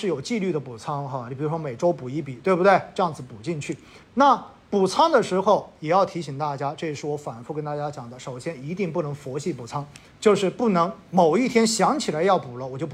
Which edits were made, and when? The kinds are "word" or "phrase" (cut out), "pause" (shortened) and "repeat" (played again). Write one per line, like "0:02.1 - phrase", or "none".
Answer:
0:04.0 - pause
0:10.1 - pause